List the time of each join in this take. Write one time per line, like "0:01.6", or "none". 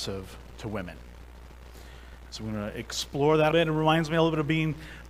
0:03.5